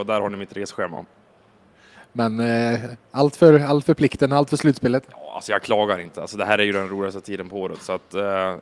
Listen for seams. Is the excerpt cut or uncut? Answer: uncut